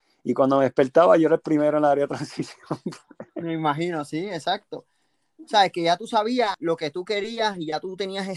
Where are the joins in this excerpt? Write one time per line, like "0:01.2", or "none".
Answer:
none